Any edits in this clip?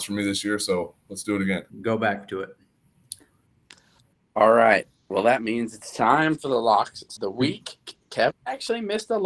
yes; 2 cuts; at 1.7 s, 7.2 s

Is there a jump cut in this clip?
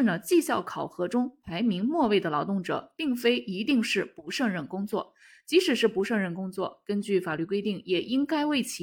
no; 0 cuts

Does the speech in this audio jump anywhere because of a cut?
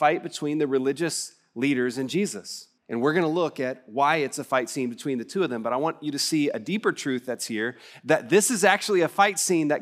yes; 1 cut; at 2.8 s

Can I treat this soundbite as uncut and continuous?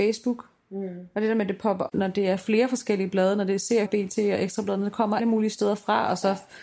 no; 3 cuts; at 1.9 s, 3.8 s, 5.2 s

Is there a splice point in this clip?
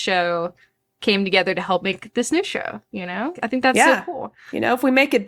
yes; 1 cut; at 3.3 s

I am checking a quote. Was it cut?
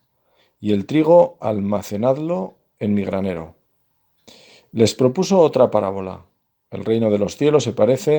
no; 0 cuts

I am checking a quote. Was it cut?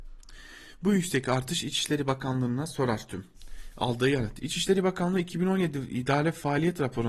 no; 0 cuts

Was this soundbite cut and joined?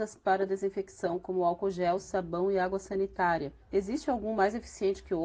yes; 1 cut; at 3.6 s

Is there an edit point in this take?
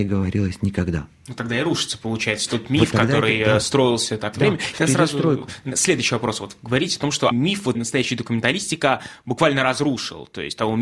yes; 3 cuts; at 4.3 s, 7.3 s, 7.7 s

